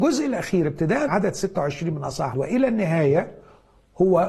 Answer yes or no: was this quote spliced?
yes